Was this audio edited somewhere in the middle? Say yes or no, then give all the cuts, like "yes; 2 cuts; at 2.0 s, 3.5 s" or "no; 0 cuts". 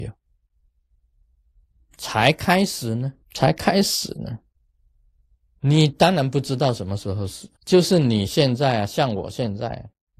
yes; 2 cuts; at 3.2 s, 7.6 s